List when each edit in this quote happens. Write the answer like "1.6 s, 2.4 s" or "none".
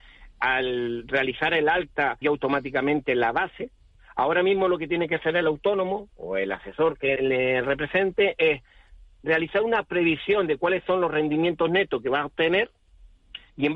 2.2 s, 7.2 s